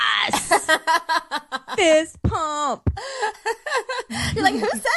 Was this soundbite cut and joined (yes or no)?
no